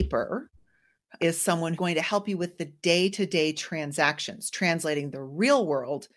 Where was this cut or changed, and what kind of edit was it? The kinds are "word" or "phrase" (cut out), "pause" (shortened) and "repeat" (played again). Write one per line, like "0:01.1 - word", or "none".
0:01.2 - word
0:01.8 - word